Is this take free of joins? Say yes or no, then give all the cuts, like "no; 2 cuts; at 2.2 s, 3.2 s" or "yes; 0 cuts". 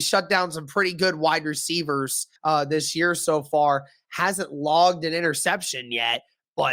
no; 1 cut; at 2.4 s